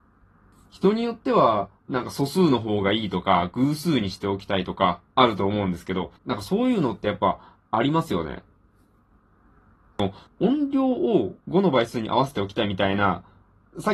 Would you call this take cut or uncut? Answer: cut